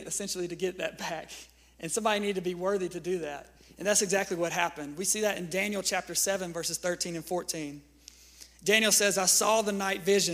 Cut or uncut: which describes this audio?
uncut